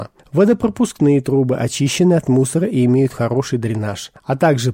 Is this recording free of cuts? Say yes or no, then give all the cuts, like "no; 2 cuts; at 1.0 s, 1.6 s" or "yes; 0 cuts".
yes; 0 cuts